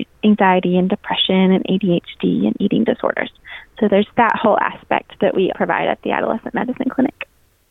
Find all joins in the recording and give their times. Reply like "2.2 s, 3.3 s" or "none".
5.5 s